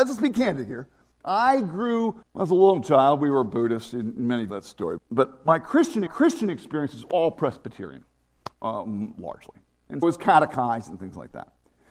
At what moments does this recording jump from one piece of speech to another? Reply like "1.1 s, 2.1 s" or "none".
2.2 s, 4.5 s, 5.0 s, 6.1 s, 8.5 s, 10.0 s